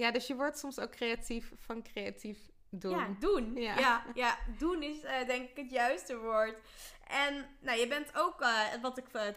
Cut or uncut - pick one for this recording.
uncut